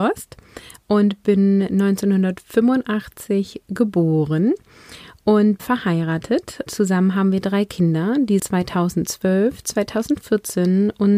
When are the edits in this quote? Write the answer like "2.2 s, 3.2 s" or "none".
5.6 s, 6.7 s, 8.4 s